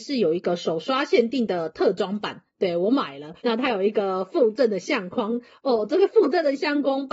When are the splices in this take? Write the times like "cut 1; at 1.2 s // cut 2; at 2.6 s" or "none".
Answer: cut 1; at 3.4 s